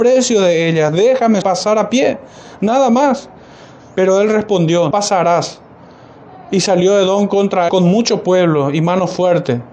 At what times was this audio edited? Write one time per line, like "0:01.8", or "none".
0:01.4
0:04.9
0:07.7